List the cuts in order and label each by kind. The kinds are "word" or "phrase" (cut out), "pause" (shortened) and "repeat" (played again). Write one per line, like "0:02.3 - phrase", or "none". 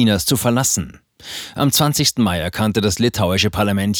none